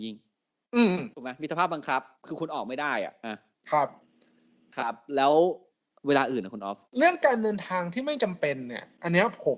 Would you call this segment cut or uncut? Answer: cut